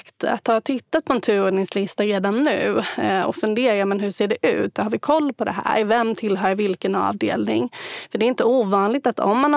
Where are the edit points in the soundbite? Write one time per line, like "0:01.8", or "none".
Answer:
none